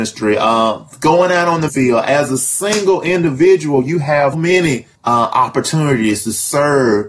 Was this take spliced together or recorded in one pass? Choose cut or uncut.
cut